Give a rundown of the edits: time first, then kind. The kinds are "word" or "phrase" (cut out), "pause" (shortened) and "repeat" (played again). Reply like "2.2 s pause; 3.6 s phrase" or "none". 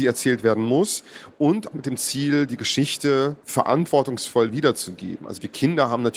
1.7 s word; 3.4 s pause